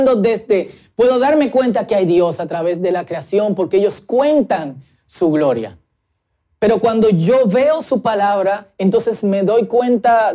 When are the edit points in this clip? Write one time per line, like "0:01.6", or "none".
none